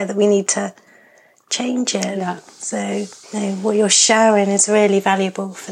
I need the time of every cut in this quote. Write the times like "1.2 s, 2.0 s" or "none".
3.2 s